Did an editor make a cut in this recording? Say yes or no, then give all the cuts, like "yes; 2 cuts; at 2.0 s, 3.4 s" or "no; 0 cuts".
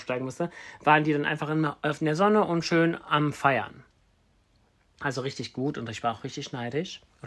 no; 0 cuts